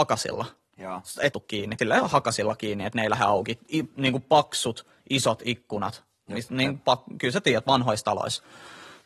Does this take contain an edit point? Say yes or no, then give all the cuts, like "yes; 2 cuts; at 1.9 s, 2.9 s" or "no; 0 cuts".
yes; 2 cuts; at 1.3 s, 1.8 s